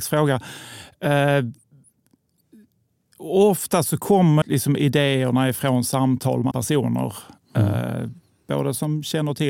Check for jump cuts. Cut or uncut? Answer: cut